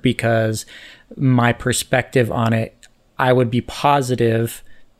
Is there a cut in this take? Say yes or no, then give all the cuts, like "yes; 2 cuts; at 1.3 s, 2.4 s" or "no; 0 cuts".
no; 0 cuts